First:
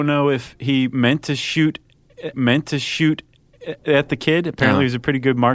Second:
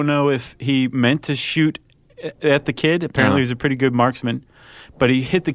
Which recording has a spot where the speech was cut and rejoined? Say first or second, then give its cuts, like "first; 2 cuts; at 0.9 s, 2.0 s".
first; 1 cut; at 2.3 s